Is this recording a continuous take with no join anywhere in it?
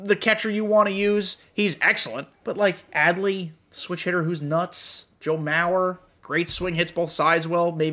no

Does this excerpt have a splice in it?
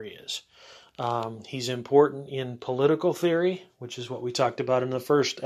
no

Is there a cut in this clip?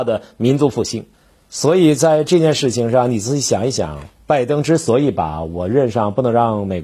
yes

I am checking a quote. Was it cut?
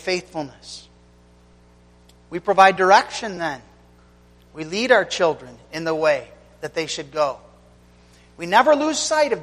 no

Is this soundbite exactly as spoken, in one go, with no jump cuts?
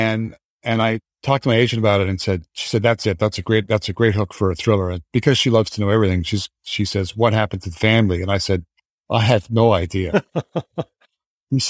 yes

